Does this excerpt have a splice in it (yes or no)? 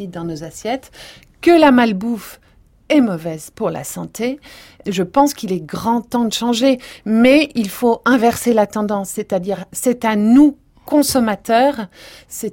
no